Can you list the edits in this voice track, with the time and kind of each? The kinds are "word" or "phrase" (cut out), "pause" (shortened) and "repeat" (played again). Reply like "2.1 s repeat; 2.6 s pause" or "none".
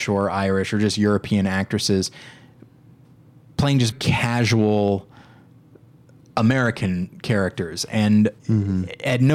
3.9 s word; 8.4 s pause